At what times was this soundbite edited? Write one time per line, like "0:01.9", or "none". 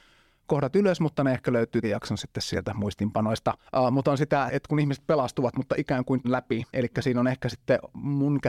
0:01.8
0:03.7
0:04.5
0:06.2
0:06.7